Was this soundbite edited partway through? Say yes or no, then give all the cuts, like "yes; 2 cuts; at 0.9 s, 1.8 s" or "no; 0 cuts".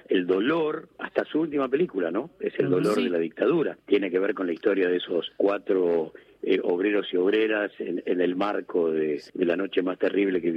no; 0 cuts